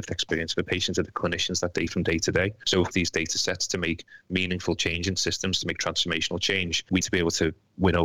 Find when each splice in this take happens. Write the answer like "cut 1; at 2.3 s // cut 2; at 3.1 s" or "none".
cut 1; at 1.9 s // cut 2; at 2.9 s // cut 3; at 7.0 s

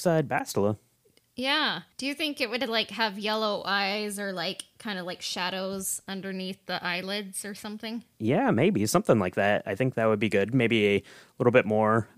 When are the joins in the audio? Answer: cut 1; at 1.9 s // cut 2; at 8.1 s

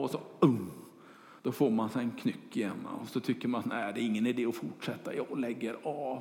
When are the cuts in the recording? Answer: cut 1; at 1.4 s

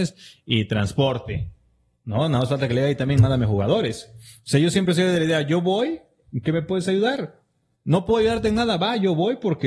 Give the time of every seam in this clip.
none

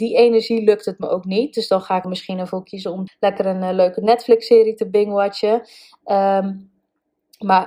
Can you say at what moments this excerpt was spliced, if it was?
cut 1; at 2.0 s // cut 2; at 3.1 s

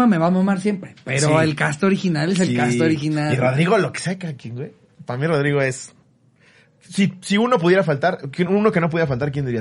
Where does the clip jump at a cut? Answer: none

